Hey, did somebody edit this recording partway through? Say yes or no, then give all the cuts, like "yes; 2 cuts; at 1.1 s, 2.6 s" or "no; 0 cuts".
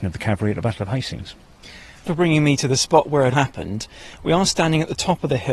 yes; 2 cuts; at 2.0 s, 3.3 s